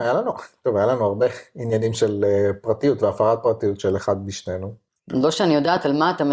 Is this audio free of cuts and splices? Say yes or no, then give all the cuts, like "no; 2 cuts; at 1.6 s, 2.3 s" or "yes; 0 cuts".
yes; 0 cuts